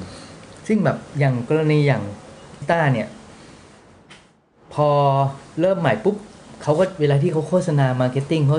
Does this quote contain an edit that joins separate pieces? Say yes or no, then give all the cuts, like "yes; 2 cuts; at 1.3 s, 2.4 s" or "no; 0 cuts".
yes; 1 cut; at 2.6 s